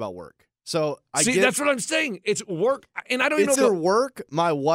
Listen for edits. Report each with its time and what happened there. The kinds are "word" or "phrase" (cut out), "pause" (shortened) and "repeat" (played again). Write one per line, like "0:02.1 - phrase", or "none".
0:03.6 - word